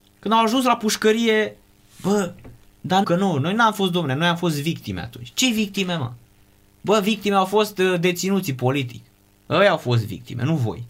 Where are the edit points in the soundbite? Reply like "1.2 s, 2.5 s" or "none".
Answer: 3.0 s